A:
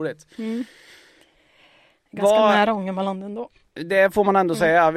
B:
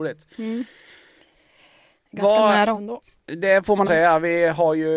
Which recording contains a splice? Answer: B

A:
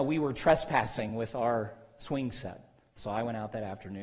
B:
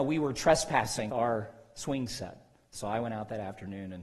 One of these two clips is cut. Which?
B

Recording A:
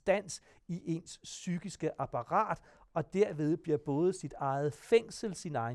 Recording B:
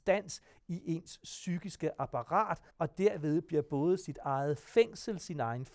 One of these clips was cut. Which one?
B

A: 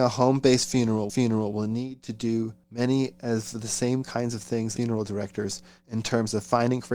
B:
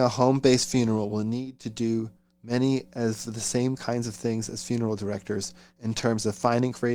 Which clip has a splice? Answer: A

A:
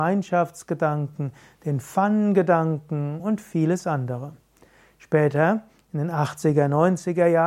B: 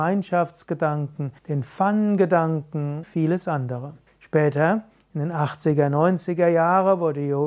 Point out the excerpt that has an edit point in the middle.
B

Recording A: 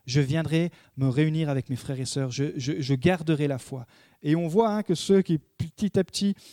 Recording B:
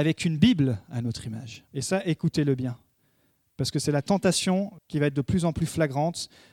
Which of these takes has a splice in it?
B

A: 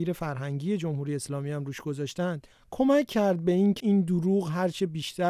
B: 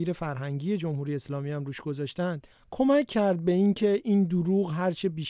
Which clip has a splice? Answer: A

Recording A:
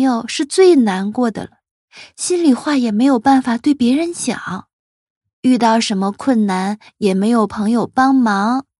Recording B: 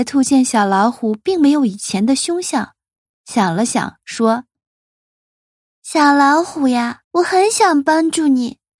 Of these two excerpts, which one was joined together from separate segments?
B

